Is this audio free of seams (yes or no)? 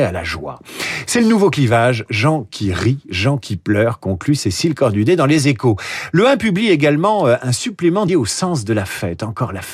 no